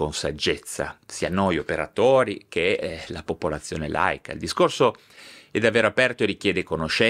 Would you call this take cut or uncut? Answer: uncut